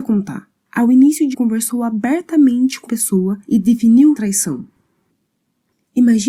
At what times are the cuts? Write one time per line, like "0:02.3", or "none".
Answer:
0:01.3
0:02.9
0:03.4
0:04.1